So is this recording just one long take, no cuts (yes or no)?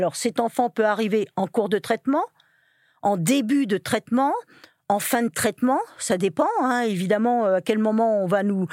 yes